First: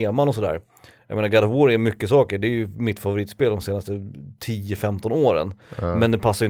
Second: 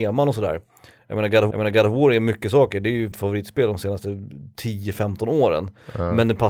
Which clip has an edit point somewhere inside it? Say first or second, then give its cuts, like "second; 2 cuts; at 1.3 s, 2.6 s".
second; 2 cuts; at 1.5 s, 3.1 s